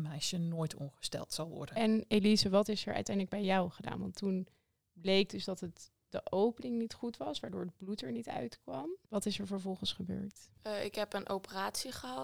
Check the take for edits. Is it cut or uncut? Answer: uncut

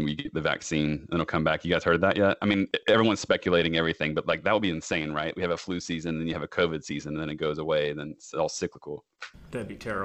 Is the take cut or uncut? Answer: uncut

